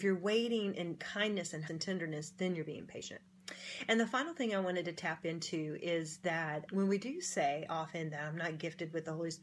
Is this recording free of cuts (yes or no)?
no